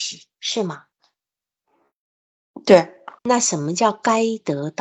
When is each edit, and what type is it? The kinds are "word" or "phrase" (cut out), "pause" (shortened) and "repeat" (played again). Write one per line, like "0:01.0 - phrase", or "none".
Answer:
0:03.2 - pause